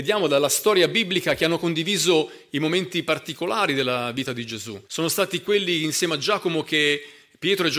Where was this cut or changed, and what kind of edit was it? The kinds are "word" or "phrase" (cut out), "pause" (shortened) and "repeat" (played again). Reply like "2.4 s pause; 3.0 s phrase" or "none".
4.8 s pause